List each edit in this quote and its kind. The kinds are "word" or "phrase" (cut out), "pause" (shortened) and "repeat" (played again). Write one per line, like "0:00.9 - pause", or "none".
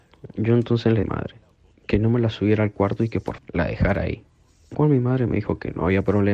0:01.0 - phrase
0:03.4 - word
0:04.7 - word